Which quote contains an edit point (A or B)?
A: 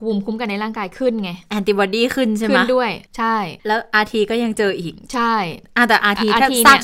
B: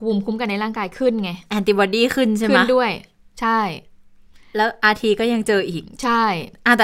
A